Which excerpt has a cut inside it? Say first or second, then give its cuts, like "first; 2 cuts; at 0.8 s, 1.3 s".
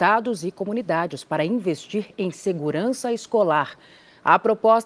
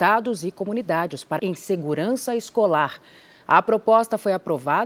second; 1 cut; at 1.4 s